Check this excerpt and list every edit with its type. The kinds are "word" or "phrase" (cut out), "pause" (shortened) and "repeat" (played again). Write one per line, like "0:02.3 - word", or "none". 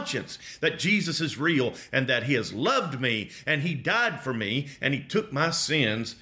none

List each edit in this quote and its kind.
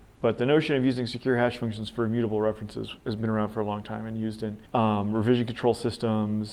0:04.7 - pause

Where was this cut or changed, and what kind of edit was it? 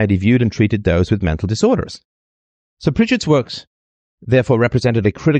none

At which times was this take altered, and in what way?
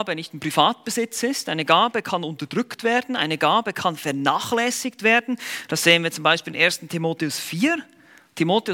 none

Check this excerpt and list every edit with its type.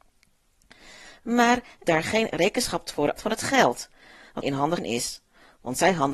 0:01.8 - word
0:03.2 - word
0:04.4 - word
0:04.8 - word

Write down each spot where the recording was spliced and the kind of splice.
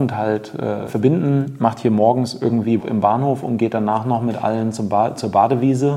0:02.8 - word

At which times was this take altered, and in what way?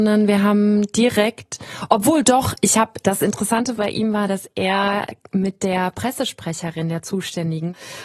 none

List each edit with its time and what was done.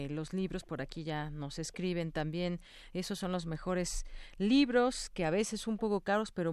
none

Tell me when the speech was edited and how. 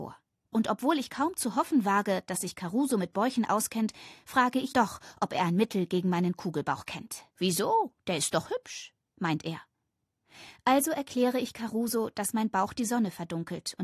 0:04.7 - word
0:07.3 - pause

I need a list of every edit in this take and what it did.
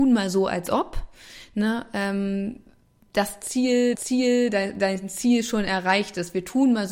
0:03.9 - repeat

